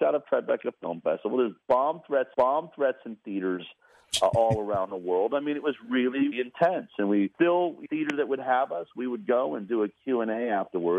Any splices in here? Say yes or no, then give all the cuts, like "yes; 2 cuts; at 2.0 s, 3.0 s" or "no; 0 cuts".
yes; 4 cuts; at 2.3 s, 6.3 s, 7.3 s, 7.9 s